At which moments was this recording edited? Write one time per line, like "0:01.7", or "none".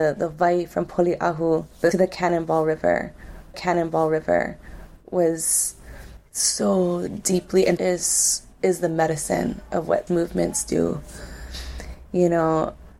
0:01.9
0:03.5
0:07.8
0:10.1